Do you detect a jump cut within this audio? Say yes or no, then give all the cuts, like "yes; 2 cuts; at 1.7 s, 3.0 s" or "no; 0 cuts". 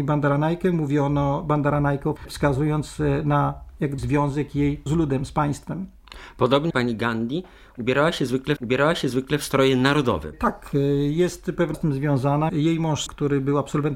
yes; 8 cuts; at 2.2 s, 4.0 s, 4.9 s, 6.7 s, 8.6 s, 11.7 s, 12.5 s, 13.1 s